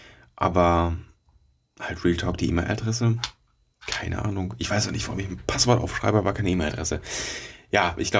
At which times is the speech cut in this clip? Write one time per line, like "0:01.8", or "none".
none